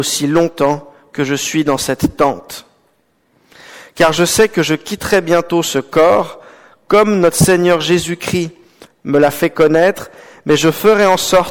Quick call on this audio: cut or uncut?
uncut